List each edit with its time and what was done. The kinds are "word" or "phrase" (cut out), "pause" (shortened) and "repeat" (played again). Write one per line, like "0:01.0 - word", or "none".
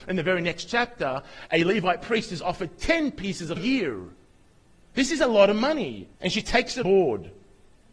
0:03.6 - phrase
0:06.1 - pause
0:06.8 - word